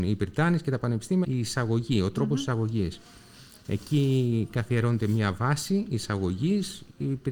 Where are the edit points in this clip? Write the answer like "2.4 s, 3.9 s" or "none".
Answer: 1.2 s